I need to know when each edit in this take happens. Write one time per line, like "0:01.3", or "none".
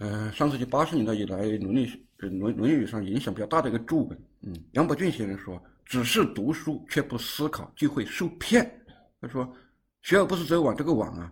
none